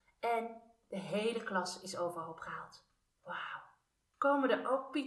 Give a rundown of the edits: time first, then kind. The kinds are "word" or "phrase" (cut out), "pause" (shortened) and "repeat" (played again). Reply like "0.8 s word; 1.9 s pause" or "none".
none